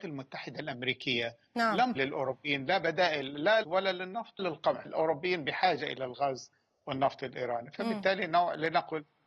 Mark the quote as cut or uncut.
cut